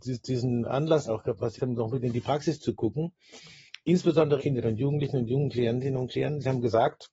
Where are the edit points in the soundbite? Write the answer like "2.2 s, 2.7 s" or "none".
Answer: 1.1 s, 1.6 s, 4.4 s